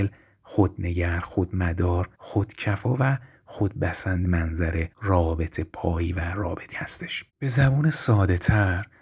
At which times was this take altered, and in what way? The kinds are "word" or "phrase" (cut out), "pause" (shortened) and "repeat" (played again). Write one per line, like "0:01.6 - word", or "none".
0:02.1 - pause
0:04.2 - word
0:04.9 - pause
0:06.7 - word
0:07.3 - pause